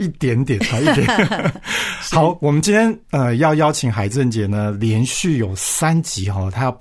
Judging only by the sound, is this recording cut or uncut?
cut